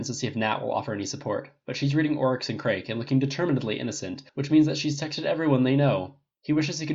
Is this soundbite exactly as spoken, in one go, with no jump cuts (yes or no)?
no